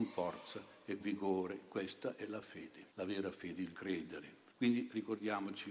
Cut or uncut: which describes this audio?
cut